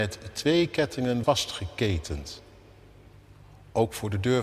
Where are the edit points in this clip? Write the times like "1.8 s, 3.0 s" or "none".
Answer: 1.2 s